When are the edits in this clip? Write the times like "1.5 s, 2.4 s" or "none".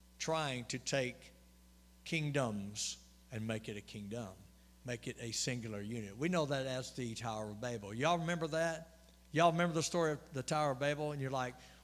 none